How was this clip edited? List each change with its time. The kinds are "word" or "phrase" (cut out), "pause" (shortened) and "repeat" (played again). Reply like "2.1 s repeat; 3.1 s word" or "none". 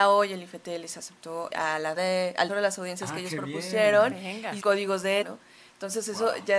1.5 s word; 2.0 s word; 2.5 s word; 4.6 s word; 5.2 s word